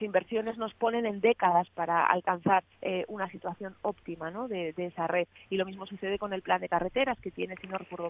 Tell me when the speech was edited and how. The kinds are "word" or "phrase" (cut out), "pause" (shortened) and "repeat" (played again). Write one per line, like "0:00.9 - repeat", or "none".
0:02.7 - pause